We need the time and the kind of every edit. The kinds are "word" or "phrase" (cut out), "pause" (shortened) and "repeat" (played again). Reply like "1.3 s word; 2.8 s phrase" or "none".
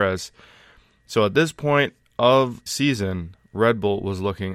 2.7 s word